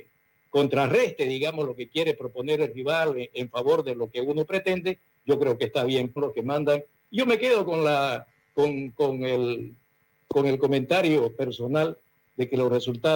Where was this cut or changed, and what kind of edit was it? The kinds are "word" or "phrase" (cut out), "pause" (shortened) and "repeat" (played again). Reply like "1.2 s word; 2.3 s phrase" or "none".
6.2 s phrase